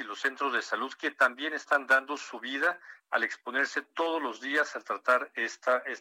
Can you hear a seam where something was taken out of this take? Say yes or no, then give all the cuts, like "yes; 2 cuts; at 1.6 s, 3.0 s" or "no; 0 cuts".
no; 0 cuts